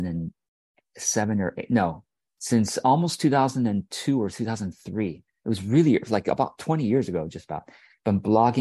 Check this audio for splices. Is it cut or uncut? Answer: cut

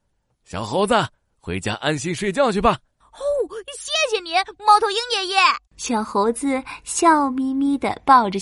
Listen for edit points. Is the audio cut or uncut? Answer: cut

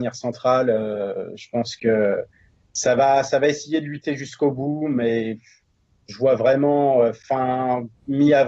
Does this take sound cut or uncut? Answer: uncut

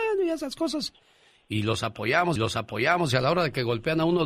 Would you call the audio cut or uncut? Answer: cut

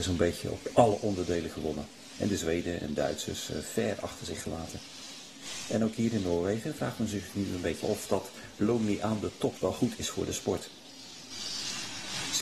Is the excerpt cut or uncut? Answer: cut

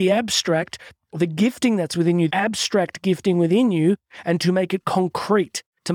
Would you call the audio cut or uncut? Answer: cut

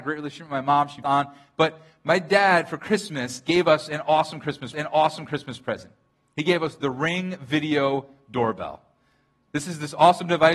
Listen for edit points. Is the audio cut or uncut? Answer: cut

